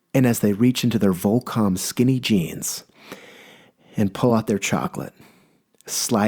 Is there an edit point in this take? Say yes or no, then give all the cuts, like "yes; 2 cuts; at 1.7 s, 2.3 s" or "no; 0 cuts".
no; 0 cuts